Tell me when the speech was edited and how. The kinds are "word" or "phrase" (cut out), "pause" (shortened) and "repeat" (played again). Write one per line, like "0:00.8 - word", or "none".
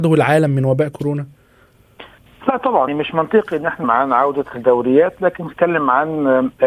0:02.9 - word
0:03.8 - word
0:05.5 - word